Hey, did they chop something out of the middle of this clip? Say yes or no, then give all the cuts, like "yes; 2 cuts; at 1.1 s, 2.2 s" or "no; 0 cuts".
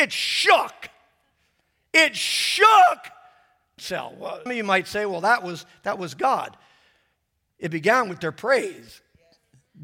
yes; 2 cuts; at 3.8 s, 4.5 s